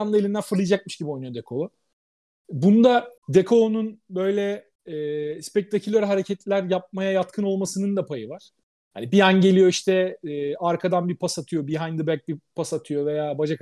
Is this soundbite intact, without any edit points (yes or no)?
no